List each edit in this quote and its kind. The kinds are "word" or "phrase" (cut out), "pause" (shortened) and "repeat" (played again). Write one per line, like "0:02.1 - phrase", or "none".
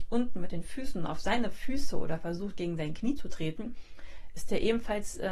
none